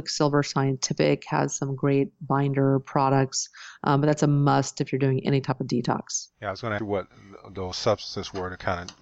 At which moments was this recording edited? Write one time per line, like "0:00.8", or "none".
0:06.8